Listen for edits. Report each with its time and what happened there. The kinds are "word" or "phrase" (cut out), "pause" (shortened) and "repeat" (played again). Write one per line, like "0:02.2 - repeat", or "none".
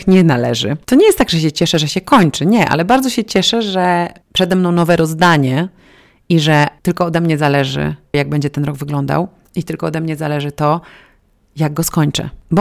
0:04.2 - pause
0:06.8 - pause
0:08.1 - word